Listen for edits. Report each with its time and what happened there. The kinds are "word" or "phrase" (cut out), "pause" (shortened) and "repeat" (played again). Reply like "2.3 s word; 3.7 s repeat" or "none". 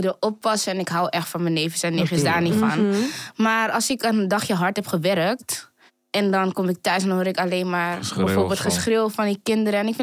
5.9 s pause